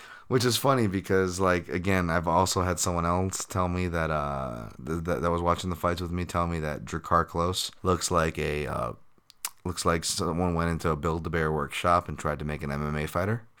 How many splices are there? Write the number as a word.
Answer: two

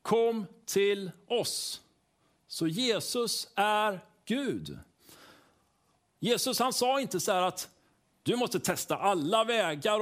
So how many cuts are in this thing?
zero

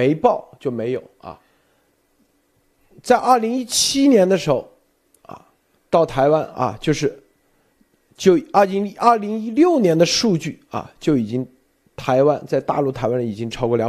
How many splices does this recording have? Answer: one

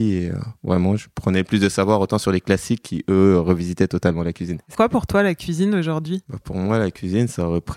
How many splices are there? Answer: two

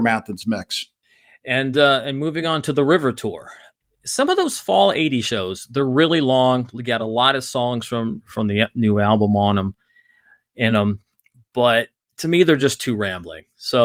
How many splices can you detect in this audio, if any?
zero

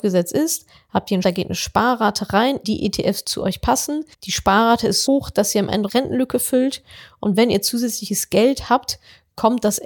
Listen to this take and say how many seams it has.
six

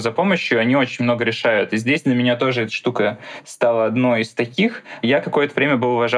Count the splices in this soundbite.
zero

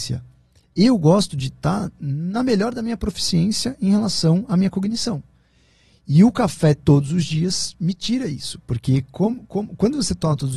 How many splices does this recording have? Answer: zero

